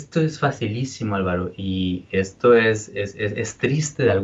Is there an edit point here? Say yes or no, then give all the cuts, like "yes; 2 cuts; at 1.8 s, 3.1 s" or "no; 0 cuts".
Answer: no; 0 cuts